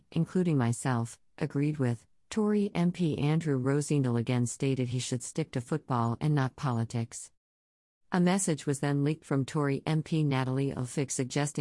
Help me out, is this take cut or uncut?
uncut